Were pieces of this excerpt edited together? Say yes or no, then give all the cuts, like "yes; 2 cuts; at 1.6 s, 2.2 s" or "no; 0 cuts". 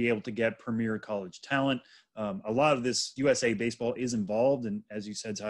yes; 1 cut; at 3.2 s